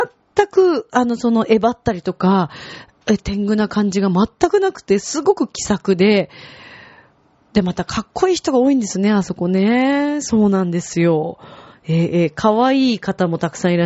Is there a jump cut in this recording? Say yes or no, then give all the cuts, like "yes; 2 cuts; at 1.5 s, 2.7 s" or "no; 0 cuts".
no; 0 cuts